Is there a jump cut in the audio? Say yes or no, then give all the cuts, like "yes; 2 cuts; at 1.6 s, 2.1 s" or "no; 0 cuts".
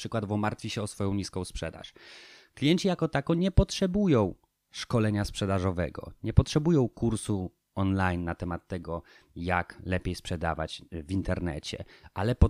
no; 0 cuts